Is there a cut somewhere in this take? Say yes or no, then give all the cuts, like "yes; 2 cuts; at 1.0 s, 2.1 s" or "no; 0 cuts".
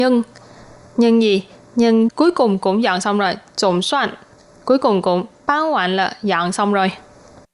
no; 0 cuts